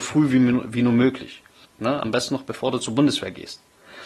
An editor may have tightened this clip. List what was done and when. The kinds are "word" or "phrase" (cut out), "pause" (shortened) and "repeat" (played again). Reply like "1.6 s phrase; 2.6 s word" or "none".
none